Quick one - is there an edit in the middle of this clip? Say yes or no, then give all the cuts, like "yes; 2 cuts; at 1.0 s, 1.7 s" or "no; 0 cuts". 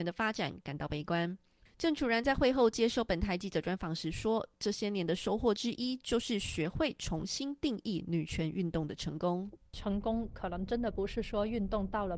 no; 0 cuts